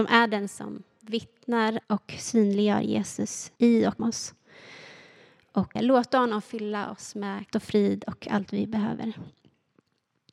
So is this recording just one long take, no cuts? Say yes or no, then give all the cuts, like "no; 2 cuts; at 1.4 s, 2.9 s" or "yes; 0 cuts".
no; 5 cuts; at 1.8 s, 3.6 s, 4.0 s, 5.8 s, 7.5 s